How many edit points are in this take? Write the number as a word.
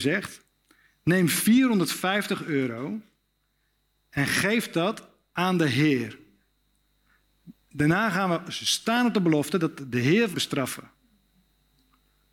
one